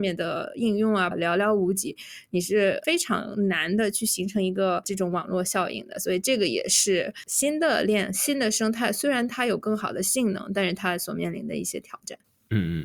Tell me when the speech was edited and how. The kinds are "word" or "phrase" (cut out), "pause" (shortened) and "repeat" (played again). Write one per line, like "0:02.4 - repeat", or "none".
0:01.1 - word